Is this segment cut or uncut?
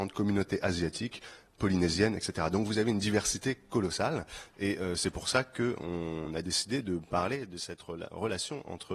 uncut